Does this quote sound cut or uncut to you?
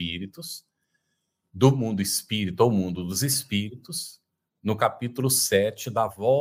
uncut